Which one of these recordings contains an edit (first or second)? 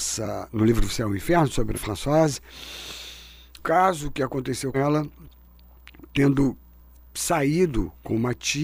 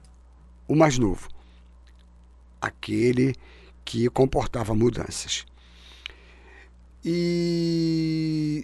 first